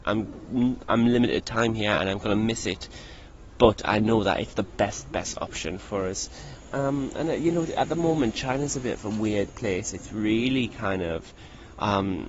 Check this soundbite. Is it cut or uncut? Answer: uncut